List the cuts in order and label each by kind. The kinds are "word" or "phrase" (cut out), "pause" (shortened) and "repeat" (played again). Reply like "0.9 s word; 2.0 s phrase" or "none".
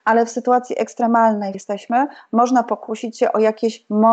1.5 s phrase